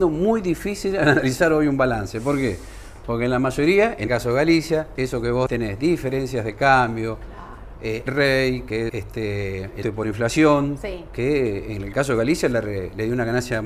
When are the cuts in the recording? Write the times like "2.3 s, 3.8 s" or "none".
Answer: 4.1 s, 5.0 s, 5.5 s, 8.1 s, 8.9 s, 9.8 s